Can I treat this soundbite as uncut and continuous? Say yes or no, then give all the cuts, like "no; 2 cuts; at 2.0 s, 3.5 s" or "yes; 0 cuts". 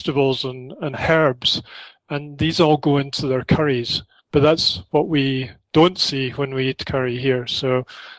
yes; 0 cuts